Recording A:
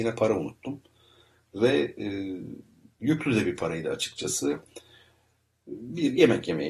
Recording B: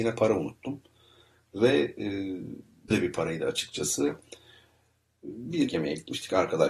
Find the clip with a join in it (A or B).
B